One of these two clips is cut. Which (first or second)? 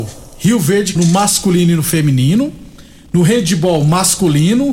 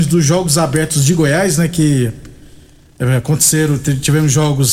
first